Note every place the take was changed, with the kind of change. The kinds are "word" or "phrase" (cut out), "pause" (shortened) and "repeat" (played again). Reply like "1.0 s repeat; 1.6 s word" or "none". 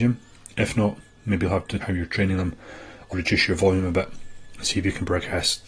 1.8 s word; 3.1 s word